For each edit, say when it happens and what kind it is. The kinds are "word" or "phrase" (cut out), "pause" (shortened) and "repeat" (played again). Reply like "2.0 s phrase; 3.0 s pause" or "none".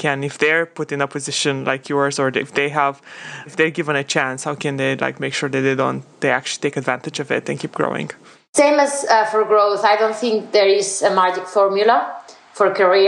3.5 s word; 6.1 s pause